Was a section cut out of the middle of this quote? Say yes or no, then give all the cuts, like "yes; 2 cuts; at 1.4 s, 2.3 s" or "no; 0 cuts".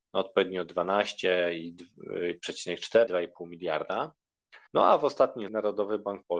yes; 3 cuts; at 3.1 s, 4.7 s, 5.5 s